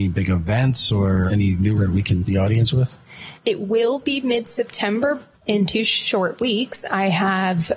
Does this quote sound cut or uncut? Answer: cut